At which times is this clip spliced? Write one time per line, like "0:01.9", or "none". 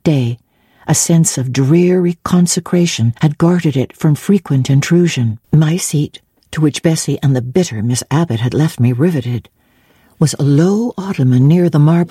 0:03.2
0:05.4